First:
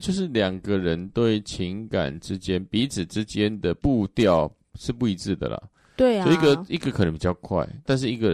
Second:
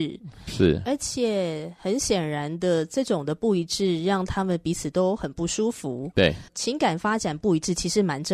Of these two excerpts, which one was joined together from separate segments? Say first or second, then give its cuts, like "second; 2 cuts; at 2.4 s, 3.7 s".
second; 1 cut; at 6.5 s